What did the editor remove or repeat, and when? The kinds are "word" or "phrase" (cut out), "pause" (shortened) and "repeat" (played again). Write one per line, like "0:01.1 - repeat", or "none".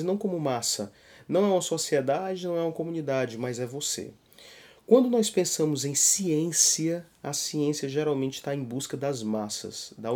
none